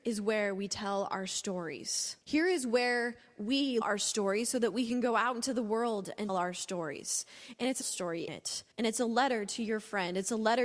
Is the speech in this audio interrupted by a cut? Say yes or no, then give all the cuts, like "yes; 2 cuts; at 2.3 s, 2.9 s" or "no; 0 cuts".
yes; 6 cuts; at 2.2 s, 3.8 s, 6.3 s, 7.8 s, 8.3 s, 8.7 s